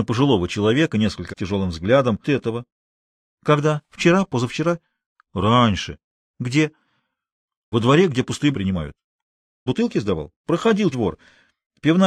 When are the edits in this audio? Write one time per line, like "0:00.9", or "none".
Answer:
0:01.3
0:02.2
0:07.7
0:08.5
0:09.7
0:10.4
0:10.9